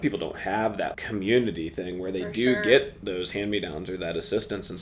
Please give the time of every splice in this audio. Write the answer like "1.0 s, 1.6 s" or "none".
0.9 s